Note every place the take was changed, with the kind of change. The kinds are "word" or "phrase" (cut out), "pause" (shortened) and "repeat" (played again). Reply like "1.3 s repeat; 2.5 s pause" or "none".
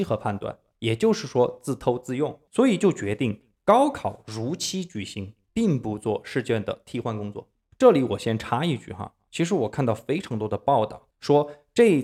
2.5 s word; 11.1 s pause